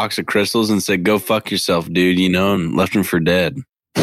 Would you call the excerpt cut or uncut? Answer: uncut